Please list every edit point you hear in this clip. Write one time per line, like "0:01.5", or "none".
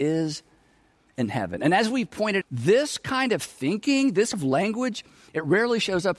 0:02.4
0:04.3